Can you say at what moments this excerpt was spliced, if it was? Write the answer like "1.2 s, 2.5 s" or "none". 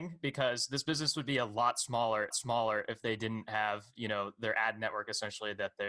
2.3 s